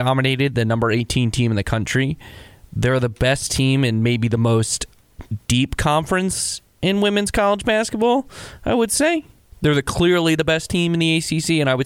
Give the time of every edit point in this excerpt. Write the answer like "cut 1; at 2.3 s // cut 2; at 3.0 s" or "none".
none